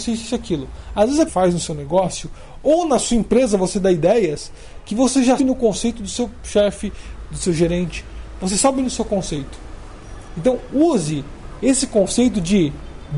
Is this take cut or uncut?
cut